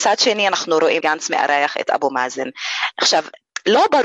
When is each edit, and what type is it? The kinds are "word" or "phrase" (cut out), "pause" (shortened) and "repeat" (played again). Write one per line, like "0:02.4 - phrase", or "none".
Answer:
0:01.0 - word